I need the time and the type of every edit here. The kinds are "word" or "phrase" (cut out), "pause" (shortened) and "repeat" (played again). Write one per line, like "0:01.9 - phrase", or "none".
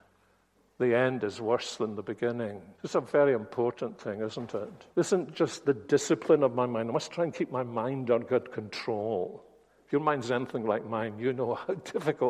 0:02.7 - pause
0:04.9 - pause